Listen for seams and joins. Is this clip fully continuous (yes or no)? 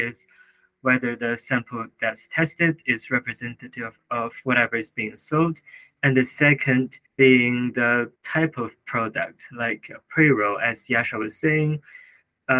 no